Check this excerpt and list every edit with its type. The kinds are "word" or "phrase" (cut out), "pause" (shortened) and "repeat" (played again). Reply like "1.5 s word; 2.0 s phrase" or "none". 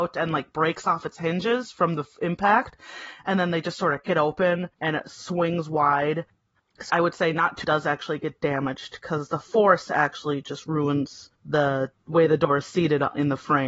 4.0 s word; 4.7 s pause; 6.9 s word; 7.6 s phrase; 11.3 s pause